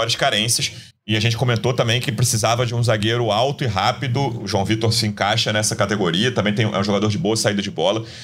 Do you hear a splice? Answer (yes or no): yes